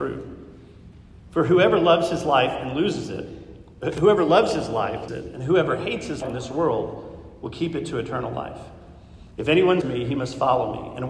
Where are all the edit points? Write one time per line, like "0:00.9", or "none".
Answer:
0:05.1
0:06.2
0:09.8